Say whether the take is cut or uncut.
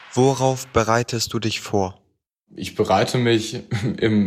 uncut